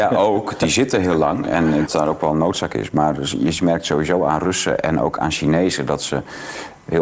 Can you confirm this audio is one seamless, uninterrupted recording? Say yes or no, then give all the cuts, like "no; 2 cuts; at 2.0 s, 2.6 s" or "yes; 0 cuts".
no; 1 cut; at 1.9 s